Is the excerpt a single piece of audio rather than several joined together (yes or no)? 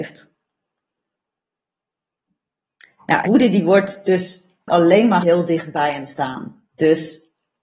no